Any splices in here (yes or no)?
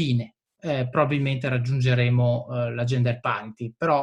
no